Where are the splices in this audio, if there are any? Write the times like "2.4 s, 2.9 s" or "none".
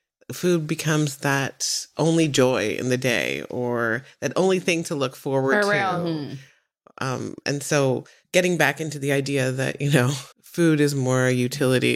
10.3 s

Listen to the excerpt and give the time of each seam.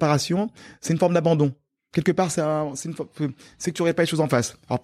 none

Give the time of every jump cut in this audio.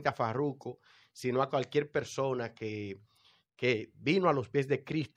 none

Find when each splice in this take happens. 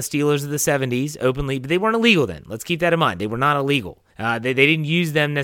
4.1 s

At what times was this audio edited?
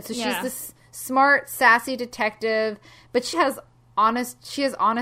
3.3 s

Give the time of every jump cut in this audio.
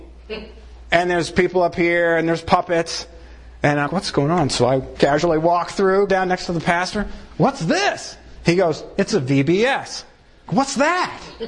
3.9 s, 5.0 s, 6.1 s, 10.5 s

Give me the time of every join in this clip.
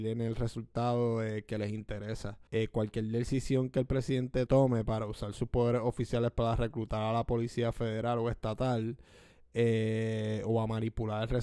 2.5 s, 4.5 s

